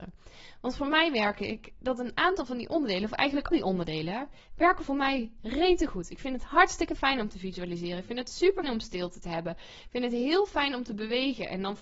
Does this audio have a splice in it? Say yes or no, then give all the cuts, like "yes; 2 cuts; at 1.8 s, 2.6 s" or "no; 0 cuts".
yes; 2 cuts; at 3.5 s, 8.6 s